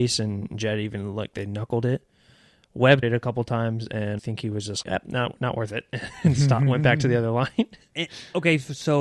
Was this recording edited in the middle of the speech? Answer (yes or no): yes